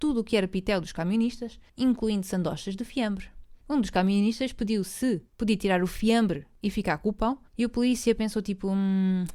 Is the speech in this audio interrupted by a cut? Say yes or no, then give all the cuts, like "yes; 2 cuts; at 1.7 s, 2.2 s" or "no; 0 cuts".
yes; 4 cuts; at 1.7 s, 3.6 s, 5.3 s, 7.5 s